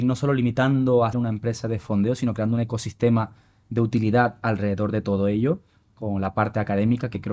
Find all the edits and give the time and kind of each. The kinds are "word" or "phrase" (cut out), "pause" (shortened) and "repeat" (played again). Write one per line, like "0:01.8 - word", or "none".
0:01.1 - word